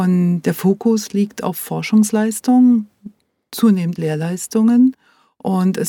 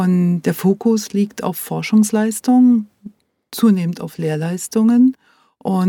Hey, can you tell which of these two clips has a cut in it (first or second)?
first